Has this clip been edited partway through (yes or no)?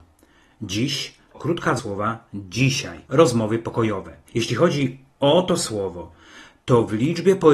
yes